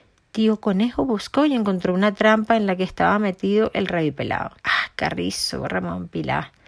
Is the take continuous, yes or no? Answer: no